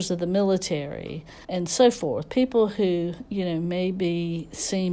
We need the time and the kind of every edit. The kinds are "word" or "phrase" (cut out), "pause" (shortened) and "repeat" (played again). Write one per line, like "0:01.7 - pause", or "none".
0:01.4 - pause